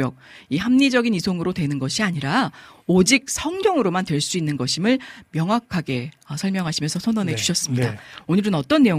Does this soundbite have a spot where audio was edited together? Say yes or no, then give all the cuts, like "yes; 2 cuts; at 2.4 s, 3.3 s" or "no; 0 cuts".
no; 0 cuts